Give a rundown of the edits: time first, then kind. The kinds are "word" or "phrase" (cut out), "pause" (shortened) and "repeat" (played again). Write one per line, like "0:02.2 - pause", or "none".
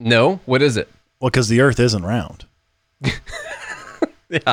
none